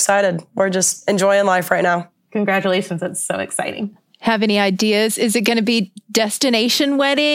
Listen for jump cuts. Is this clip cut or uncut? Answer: uncut